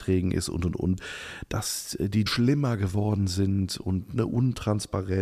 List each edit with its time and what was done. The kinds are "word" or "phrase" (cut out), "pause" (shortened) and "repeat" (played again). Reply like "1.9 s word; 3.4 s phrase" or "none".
2.3 s word